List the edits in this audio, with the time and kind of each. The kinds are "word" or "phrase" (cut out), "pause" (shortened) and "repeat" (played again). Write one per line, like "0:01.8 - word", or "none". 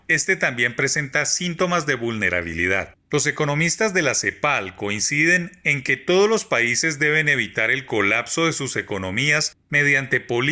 0:03.0 - pause

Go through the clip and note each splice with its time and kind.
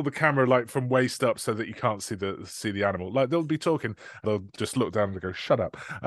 0:04.2 - phrase

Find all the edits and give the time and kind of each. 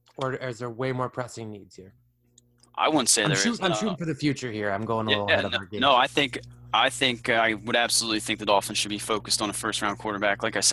none

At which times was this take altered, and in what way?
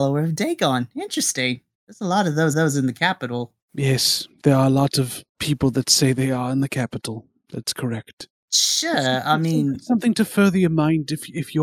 0:02.5 - repeat
0:05.3 - pause

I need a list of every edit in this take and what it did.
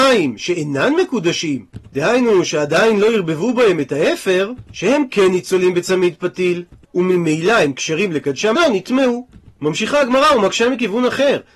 0:08.5 - phrase

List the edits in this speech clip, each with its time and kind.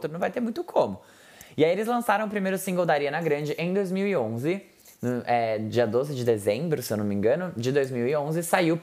none

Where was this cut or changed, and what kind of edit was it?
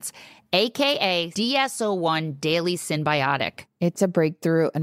0:01.3 - word

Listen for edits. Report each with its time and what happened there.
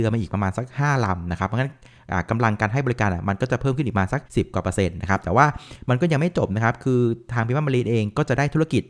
0:04.2 - pause

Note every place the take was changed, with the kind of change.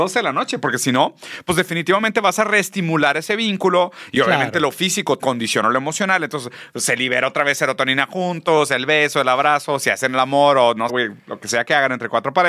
0:05.2 - word
0:10.9 - word

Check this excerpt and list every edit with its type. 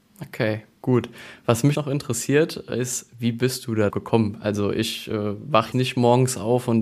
0:01.7 - word
0:03.9 - word
0:05.7 - word

